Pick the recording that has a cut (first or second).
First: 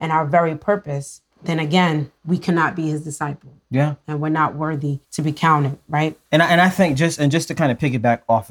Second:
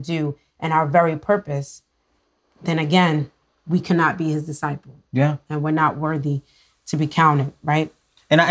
first